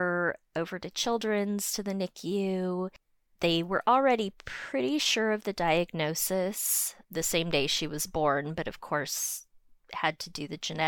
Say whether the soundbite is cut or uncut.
cut